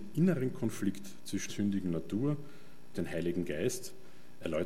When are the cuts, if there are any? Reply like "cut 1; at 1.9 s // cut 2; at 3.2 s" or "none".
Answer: cut 1; at 1.5 s // cut 2; at 2.9 s